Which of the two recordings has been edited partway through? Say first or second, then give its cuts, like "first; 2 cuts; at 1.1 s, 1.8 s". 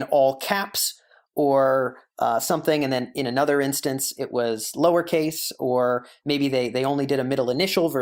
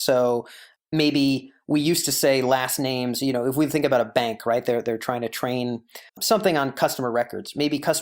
second; 1 cut; at 6.1 s